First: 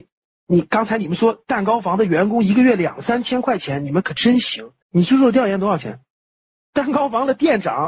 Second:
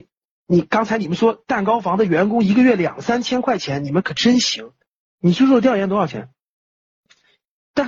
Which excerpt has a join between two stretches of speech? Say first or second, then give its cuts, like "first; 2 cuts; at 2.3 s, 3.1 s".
first; 2 cuts; at 4.8 s, 6.4 s